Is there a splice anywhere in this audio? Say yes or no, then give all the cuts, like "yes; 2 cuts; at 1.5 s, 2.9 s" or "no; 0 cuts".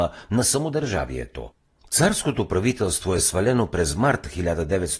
no; 0 cuts